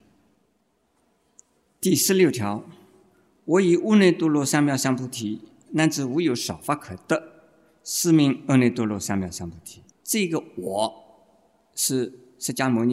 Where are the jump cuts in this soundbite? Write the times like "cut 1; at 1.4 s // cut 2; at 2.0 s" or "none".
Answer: cut 1; at 9.9 s